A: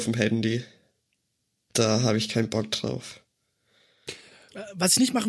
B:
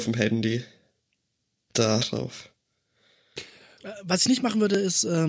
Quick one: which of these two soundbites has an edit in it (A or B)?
B